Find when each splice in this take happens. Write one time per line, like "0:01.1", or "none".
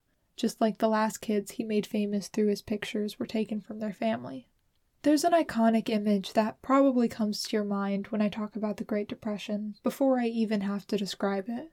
none